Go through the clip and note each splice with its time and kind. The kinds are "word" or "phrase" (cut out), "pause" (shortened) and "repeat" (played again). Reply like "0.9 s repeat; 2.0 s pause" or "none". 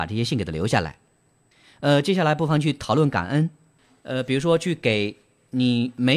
none